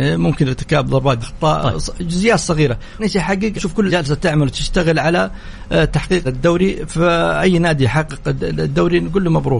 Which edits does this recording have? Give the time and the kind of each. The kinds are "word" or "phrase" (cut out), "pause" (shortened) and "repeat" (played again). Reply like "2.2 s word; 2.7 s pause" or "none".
1.2 s word; 3.0 s word; 3.6 s word; 3.9 s word; 6.2 s word